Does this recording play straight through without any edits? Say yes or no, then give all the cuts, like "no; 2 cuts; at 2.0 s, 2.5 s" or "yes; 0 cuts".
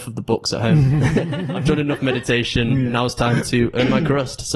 yes; 0 cuts